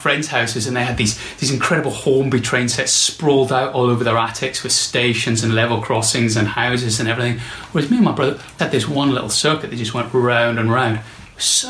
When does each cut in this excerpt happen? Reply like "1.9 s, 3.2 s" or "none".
8.6 s